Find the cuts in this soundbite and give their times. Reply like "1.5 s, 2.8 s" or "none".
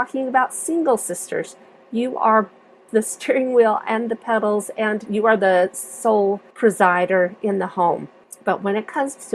none

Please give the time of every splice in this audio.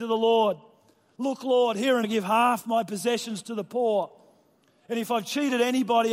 2.0 s

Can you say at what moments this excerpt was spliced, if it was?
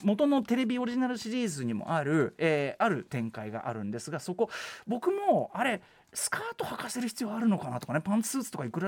none

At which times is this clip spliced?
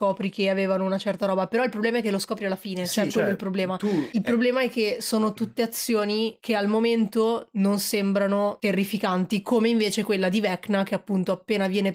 3.1 s

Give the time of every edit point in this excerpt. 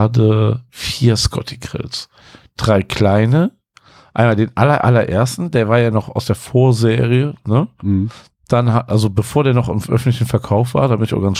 none

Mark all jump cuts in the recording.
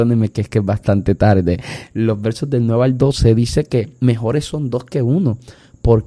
none

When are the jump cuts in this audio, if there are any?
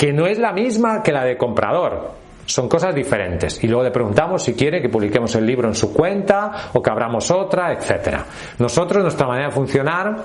none

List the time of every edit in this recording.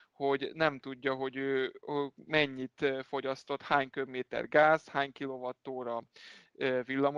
none

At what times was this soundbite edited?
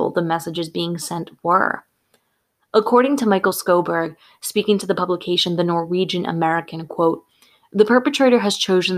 none

